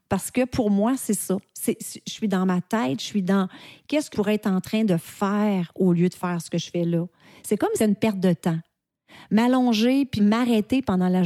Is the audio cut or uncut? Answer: cut